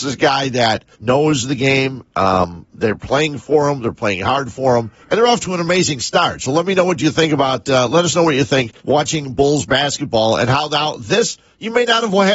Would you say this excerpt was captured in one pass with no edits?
no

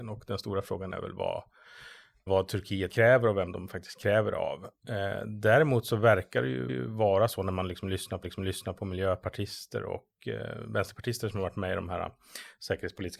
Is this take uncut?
no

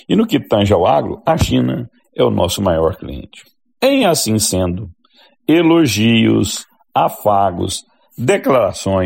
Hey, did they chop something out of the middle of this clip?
no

